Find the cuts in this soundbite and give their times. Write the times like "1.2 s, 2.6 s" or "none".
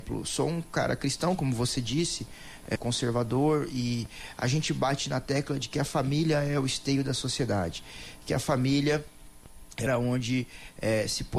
2.8 s, 9.9 s